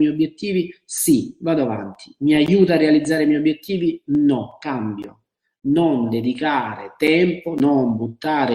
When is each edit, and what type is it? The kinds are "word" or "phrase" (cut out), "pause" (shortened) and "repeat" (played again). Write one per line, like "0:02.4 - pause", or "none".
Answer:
none